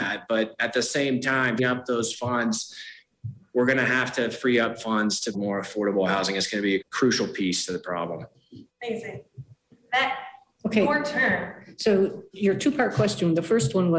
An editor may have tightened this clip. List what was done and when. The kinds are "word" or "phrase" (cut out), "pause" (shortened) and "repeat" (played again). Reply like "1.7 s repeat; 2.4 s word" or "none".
1.6 s word; 5.3 s word; 6.8 s word; 8.7 s pause